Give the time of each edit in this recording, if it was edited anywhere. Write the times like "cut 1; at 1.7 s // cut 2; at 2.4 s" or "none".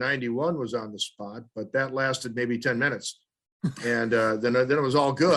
none